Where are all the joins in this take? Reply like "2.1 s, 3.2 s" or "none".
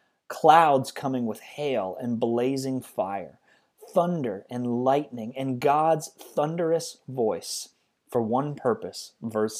none